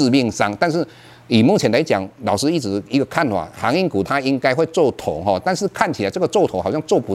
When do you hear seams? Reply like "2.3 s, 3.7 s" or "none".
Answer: none